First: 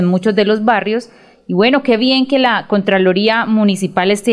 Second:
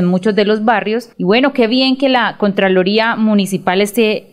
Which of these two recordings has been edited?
second; 1 cut; at 1.1 s

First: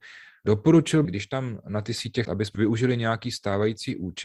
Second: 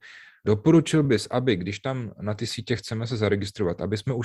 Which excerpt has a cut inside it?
first; 3 cuts; at 1.0 s, 2.2 s, 2.5 s

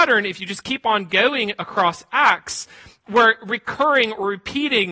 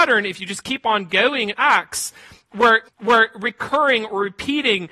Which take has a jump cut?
second; 2 cuts; at 1.5 s, 2.8 s

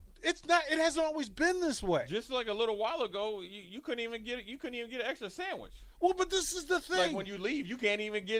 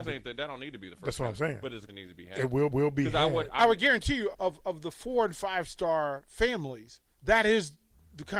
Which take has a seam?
second; 5 cuts; at 1.9 s, 2.7 s, 3.6 s, 4.3 s, 7.1 s

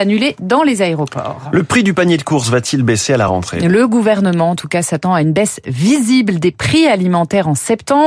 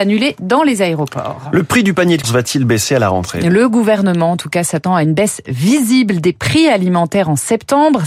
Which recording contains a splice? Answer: second; 1 cut; at 2.2 s

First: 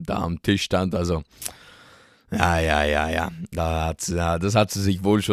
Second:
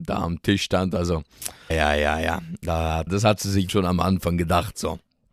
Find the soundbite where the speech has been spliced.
second; 3 cuts; at 1.7 s, 3.1 s, 3.7 s

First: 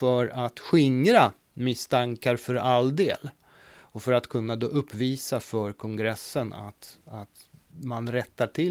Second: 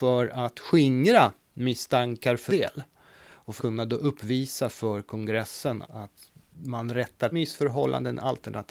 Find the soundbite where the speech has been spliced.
second; 4 cuts; at 2.5 s, 3.6 s, 5.8 s, 7.3 s

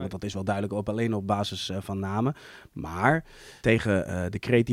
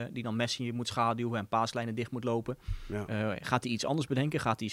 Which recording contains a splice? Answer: first; 1 cut; at 3.6 s

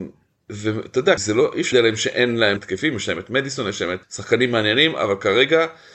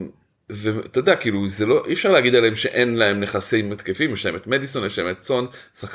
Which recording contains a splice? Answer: first; 4 cuts; at 1.2 s, 1.7 s, 2.6 s, 4.0 s

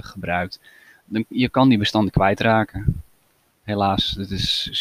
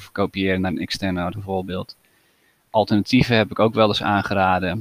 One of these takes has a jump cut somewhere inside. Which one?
second; 1 cut; at 1.3 s

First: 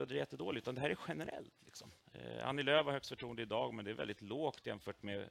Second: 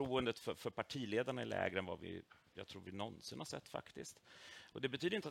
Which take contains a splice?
first; 1 cut; at 2.0 s

